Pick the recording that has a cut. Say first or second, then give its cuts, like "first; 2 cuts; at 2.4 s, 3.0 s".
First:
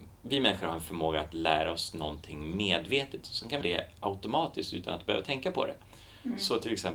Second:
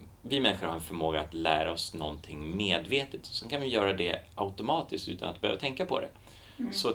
first; 1 cut; at 3.6 s